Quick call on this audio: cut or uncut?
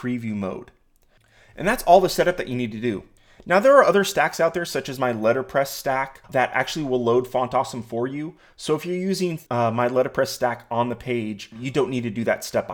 cut